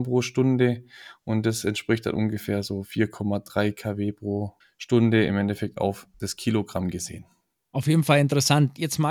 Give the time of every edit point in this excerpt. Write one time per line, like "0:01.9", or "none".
0:04.6
0:06.1

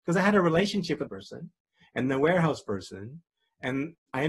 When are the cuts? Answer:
0:01.1

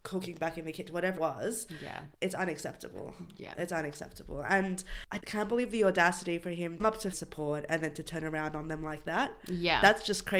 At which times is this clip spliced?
0:01.2
0:02.1
0:05.2
0:06.8
0:07.1

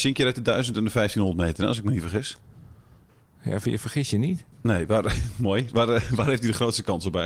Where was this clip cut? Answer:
0:03.1
0:04.5

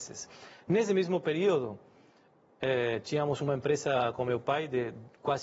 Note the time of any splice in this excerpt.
none

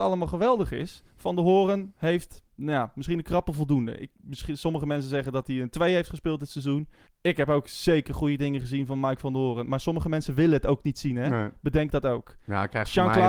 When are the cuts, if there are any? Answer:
0:01.1
0:02.5
0:07.1

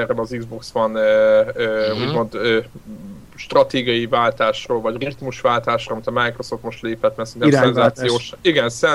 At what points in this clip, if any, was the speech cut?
0:03.2

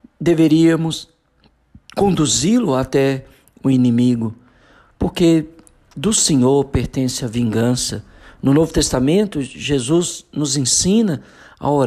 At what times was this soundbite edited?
none

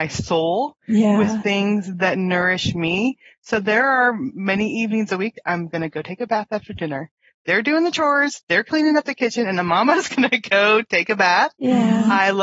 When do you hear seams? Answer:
none

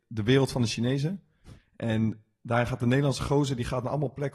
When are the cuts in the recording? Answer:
none

